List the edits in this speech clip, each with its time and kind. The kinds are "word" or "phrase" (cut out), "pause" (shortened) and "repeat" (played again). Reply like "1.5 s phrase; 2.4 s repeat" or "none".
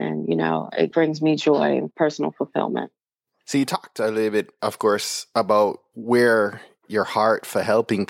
0.9 s word; 1.9 s word